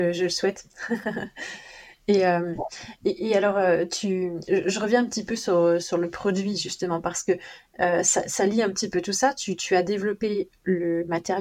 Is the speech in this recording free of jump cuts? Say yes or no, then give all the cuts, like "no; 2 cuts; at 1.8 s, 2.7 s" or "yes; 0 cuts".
yes; 0 cuts